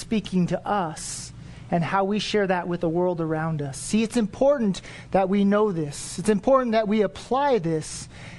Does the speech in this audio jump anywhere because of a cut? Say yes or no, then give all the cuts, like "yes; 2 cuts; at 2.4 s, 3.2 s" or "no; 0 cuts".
no; 0 cuts